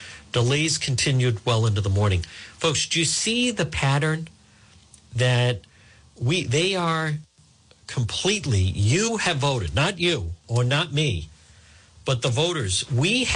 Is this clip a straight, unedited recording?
yes; 0 cuts

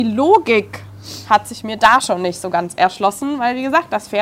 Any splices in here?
no; 0 cuts

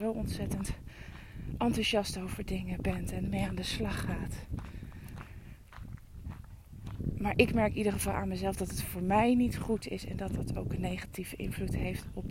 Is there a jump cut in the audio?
no; 0 cuts

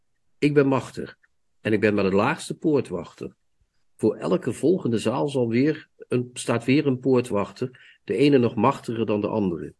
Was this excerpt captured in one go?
yes; 0 cuts

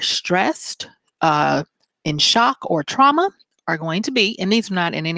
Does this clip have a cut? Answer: no; 0 cuts

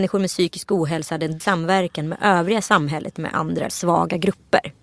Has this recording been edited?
yes; 3 cuts; at 1.4 s, 3.2 s, 3.7 s

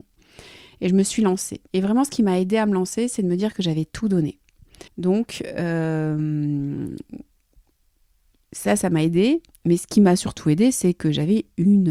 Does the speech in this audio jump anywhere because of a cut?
yes; 2 cuts; at 1.7 s, 4.9 s

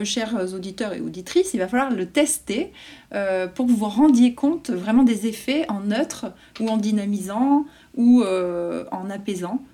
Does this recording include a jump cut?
no; 0 cuts

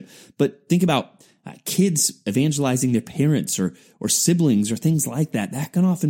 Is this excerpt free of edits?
yes; 0 cuts

